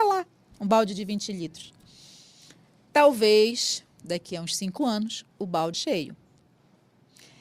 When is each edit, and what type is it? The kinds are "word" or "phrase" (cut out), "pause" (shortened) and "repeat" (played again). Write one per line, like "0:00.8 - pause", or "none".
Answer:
0:05.3 - pause
0:05.7 - word